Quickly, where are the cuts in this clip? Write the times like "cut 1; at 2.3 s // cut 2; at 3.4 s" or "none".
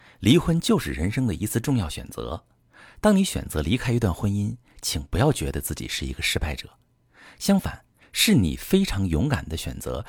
none